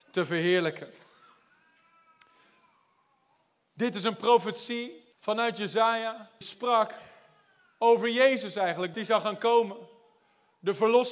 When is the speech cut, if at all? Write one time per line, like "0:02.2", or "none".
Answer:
0:05.1
0:06.4
0:08.9

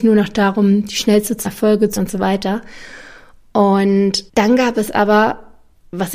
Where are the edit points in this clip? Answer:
0:01.4
0:02.0
0:04.3

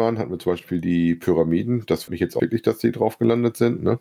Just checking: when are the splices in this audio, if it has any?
0:02.1
0:02.4

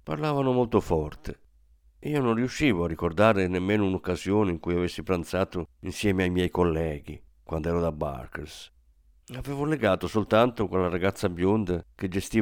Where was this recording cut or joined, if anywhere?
none

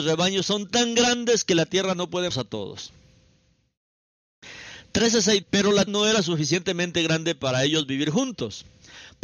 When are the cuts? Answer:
0:02.3
0:05.4
0:05.9

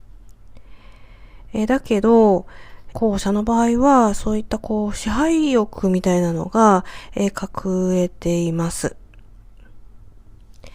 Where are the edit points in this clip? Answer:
0:02.9

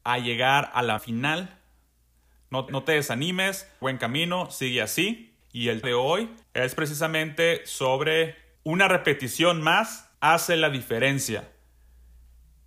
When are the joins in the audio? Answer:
0:01.0
0:02.7
0:03.8
0:05.4
0:05.8
0:06.4
0:08.6
0:10.1

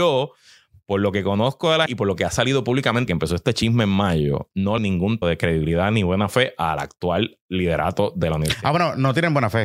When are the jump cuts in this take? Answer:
0:01.9
0:03.1
0:04.8
0:05.2

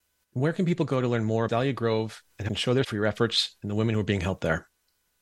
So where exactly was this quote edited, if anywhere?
0:01.5
0:02.5
0:02.8

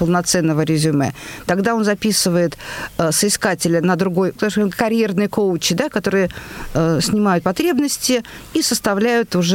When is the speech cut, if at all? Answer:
0:04.4

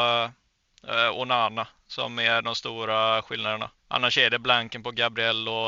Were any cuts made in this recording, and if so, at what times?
0:03.8

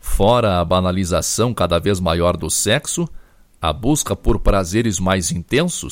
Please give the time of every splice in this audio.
none

